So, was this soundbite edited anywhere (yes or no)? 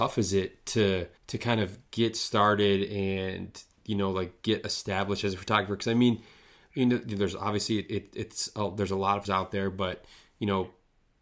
yes